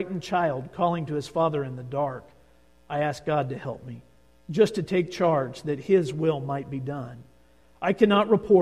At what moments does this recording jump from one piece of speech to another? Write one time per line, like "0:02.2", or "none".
none